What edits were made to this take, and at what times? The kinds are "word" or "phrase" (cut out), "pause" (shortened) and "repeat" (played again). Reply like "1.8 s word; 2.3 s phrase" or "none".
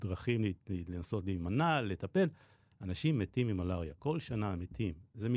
none